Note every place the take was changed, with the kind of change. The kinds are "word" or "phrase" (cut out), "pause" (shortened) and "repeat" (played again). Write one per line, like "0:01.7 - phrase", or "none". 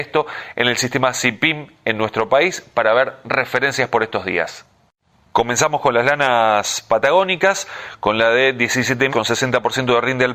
0:09.1 - word